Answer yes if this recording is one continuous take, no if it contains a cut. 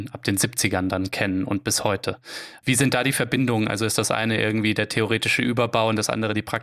yes